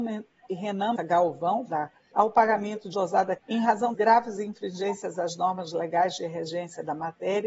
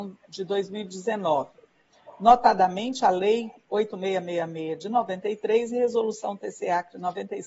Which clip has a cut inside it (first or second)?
first